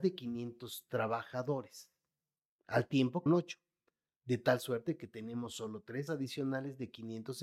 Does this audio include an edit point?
yes; 2 cuts; at 3.3 s, 6.1 s

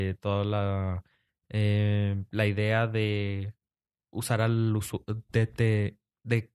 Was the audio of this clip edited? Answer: no; 0 cuts

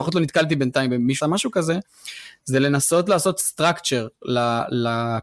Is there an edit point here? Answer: yes; 1 cut; at 1.2 s

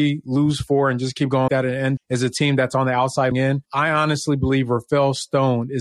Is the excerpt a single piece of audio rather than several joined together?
no; 3 cuts; at 1.5 s, 2.0 s, 3.3 s

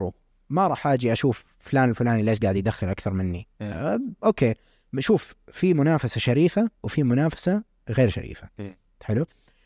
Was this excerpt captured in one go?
yes; 0 cuts

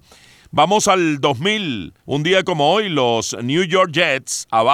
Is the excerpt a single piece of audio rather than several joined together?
no; 1 cut; at 2.0 s

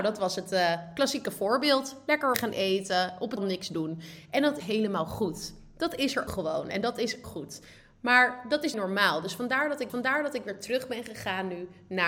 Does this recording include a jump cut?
yes; 7 cuts; at 2.3 s, 3.4 s, 4.6 s, 6.3 s, 7.2 s, 8.7 s, 9.9 s

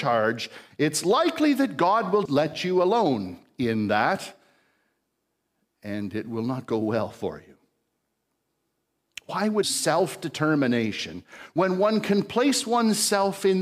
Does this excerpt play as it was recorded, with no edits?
no; 2 cuts; at 2.3 s, 9.6 s

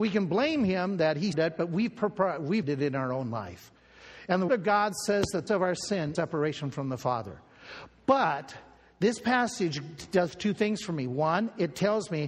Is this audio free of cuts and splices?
no; 5 cuts; at 1.3 s, 2.6 s, 4.5 s, 5.5 s, 6.1 s

